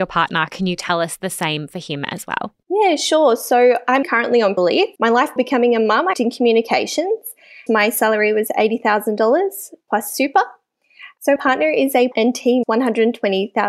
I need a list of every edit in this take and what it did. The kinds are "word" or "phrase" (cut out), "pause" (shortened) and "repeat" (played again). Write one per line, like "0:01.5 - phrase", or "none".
0:04.0 - word
0:04.6 - word
0:05.0 - word
0:05.4 - word
0:06.1 - word
0:07.7 - word
0:11.4 - word
0:12.1 - word
0:12.6 - word

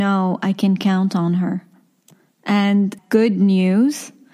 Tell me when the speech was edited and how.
0:03.0 - phrase

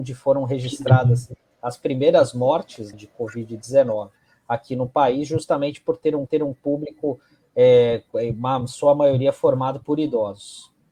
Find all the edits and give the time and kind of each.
0:02.9 - word
0:06.3 - repeat

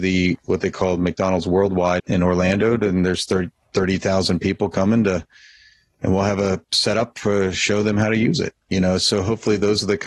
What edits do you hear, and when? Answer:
0:02.0 - word

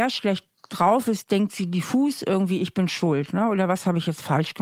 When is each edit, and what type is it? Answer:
none

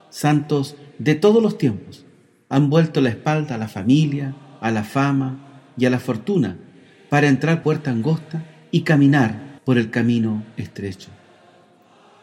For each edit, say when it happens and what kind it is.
0:07.6 - phrase
0:09.6 - pause

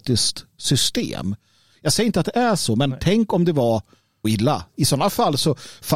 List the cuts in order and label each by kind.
0:04.2 - word

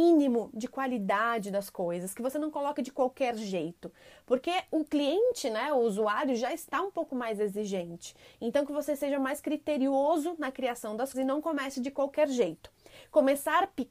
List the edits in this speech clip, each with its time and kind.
0:11.1 - word

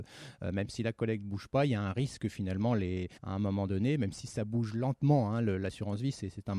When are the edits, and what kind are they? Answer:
0:03.2 - pause

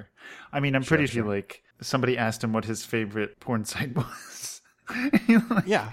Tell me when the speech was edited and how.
0:01.1 - word
0:01.7 - pause
0:03.3 - word

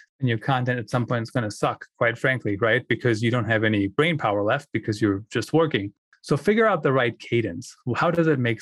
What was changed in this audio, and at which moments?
none

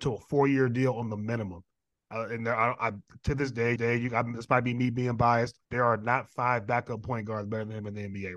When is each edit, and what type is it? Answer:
0:03.8 - repeat
0:05.6 - pause

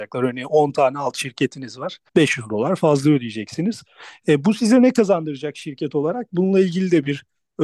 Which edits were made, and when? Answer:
0:02.1 - pause

